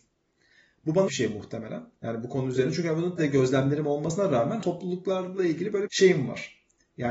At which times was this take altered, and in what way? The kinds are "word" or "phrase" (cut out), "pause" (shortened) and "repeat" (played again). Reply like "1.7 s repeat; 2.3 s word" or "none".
1.1 s word; 3.2 s word; 4.6 s word; 5.9 s word